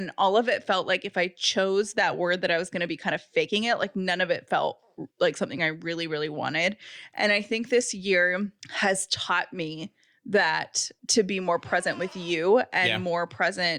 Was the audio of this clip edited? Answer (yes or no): yes